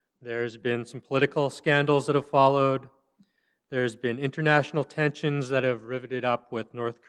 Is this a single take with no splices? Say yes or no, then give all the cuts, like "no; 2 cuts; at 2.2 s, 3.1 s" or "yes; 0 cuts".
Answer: yes; 0 cuts